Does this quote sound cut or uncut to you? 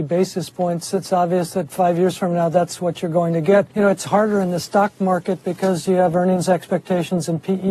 cut